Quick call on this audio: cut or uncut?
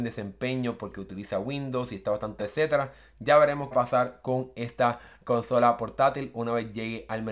cut